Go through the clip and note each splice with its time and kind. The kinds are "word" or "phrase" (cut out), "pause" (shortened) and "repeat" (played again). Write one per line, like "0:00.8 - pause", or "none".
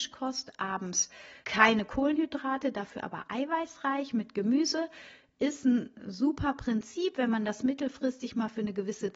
0:01.4 - pause